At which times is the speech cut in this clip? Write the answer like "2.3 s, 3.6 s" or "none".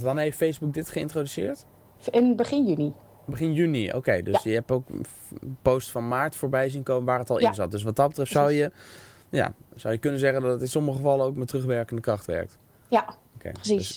none

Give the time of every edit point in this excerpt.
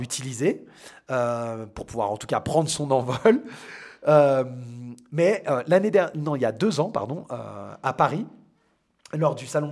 none

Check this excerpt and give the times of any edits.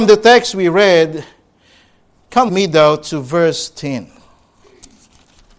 2.5 s

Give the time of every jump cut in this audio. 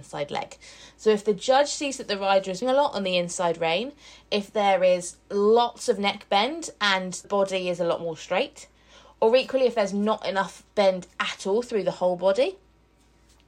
2.6 s, 7.2 s

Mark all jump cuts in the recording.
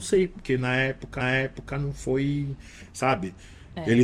1.2 s

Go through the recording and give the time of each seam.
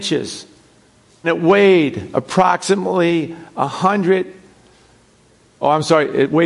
1.2 s

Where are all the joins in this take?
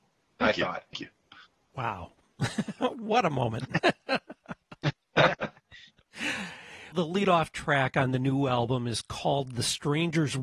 0.9 s, 6.9 s

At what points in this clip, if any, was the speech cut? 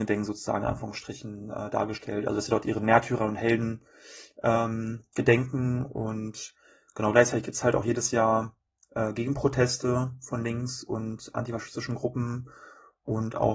none

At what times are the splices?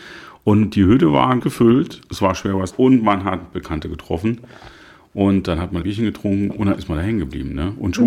1.4 s, 2.7 s, 5.8 s

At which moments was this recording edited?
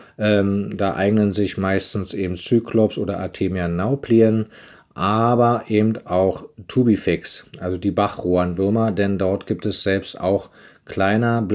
none

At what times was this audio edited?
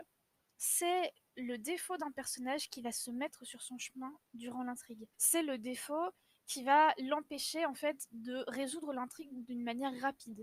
5.1 s

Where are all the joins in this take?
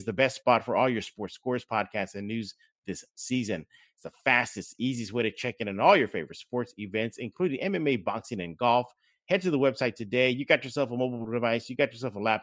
none

